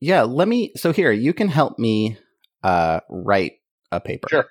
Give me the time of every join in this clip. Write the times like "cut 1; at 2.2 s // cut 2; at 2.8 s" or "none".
none